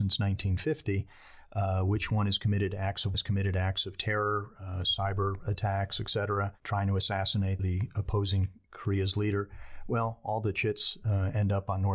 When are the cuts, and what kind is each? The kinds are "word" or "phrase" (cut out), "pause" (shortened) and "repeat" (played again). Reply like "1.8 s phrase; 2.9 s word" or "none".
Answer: 3.1 s phrase; 7.6 s word

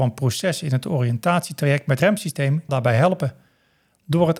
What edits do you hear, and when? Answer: 2.0 s word; 2.7 s word

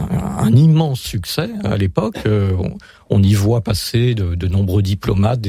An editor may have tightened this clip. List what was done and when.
1.6 s word

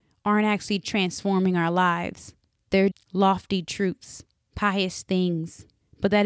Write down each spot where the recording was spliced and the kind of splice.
2.9 s word

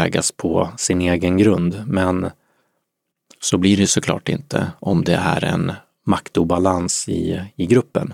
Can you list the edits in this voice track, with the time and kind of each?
none

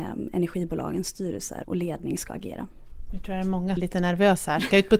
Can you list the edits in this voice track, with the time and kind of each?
1.6 s word; 3.8 s phrase

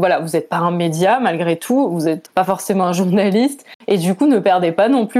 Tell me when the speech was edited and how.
2.2 s word

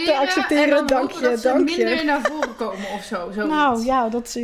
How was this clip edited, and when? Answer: none

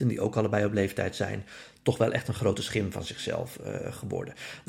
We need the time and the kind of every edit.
none

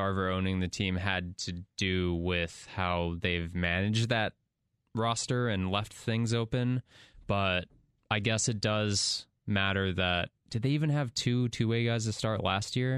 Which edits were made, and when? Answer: 9.4 s pause

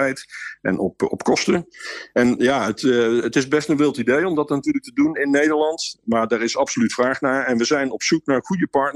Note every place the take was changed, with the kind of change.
5.2 s word

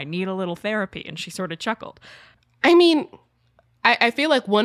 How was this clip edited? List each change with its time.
none

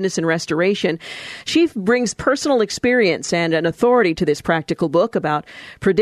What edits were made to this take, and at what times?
none

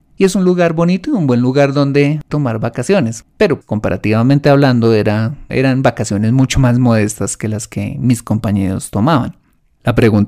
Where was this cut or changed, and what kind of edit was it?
3.6 s word

